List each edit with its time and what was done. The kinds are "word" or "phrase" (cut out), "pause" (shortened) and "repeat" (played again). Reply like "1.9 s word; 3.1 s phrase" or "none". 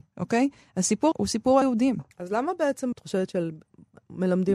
1.1 s word; 1.6 s word; 2.1 s pause; 2.9 s word